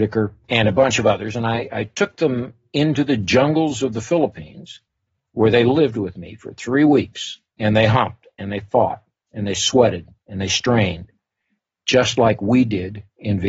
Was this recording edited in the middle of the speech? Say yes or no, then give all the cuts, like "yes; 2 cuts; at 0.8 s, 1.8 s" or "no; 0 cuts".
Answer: no; 0 cuts